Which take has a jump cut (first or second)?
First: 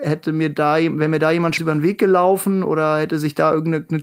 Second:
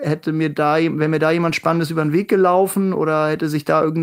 first